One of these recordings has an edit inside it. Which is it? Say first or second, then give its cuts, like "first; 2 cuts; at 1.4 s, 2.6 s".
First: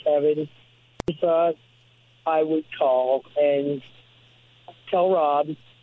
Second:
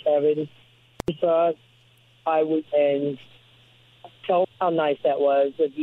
second; 2 cuts; at 2.7 s, 4.4 s